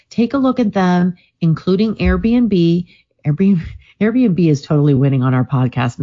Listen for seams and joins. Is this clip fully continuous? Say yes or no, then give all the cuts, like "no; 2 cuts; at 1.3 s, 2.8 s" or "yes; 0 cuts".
yes; 0 cuts